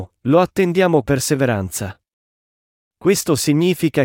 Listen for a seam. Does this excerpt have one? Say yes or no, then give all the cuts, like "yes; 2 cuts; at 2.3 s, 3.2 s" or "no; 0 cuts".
yes; 1 cut; at 1.0 s